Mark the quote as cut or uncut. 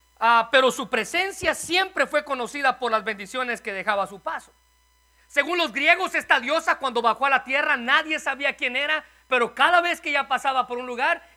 uncut